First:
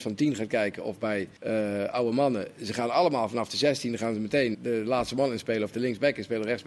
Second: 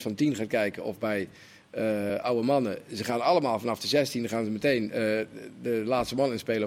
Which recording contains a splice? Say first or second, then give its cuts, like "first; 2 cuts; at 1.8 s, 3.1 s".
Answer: first; 2 cuts; at 1.4 s, 4.5 s